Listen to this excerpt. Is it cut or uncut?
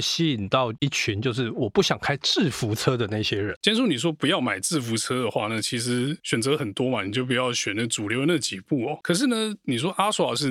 cut